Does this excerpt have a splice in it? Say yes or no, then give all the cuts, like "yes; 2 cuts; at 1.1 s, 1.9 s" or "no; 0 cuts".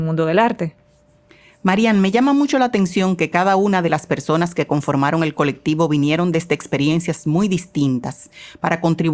no; 0 cuts